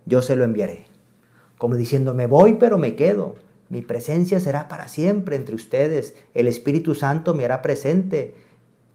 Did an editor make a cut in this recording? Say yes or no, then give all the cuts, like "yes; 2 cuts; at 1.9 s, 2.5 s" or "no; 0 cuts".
no; 0 cuts